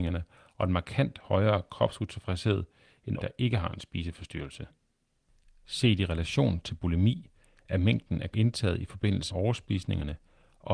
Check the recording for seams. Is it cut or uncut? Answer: cut